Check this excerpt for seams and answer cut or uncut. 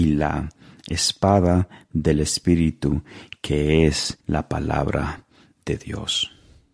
cut